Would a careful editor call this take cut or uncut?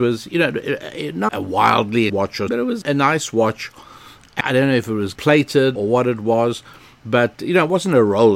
cut